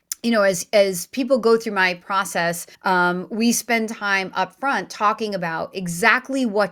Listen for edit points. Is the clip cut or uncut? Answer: cut